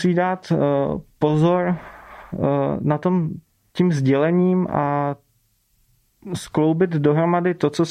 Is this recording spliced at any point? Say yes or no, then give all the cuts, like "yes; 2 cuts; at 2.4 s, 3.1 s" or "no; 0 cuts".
no; 0 cuts